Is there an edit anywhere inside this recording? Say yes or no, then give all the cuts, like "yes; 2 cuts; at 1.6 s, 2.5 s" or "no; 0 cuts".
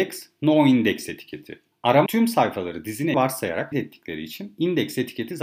yes; 3 cuts; at 2.1 s, 3.1 s, 3.7 s